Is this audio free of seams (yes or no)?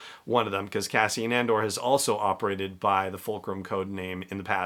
yes